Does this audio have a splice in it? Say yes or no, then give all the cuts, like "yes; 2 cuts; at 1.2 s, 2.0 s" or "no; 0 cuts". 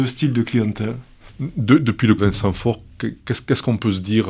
yes; 1 cut; at 2.2 s